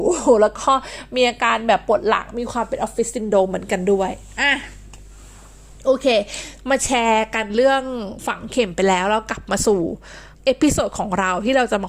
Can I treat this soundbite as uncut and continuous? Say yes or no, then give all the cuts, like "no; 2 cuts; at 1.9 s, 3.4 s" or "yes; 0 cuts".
no; 1 cut; at 10.3 s